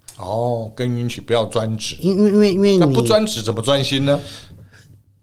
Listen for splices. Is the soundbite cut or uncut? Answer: cut